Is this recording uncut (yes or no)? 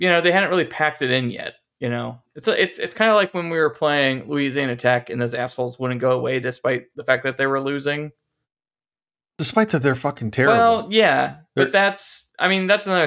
yes